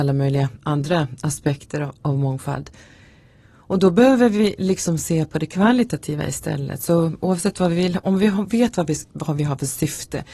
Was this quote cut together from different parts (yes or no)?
no